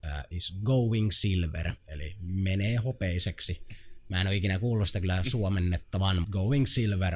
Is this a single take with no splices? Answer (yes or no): no